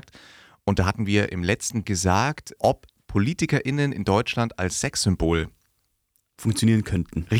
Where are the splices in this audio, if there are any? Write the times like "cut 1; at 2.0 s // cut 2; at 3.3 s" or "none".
cut 1; at 1.8 s // cut 2; at 2.6 s